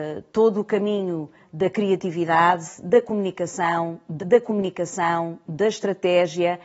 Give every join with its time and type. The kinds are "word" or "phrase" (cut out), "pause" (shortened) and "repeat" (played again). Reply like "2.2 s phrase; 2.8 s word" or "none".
4.2 s repeat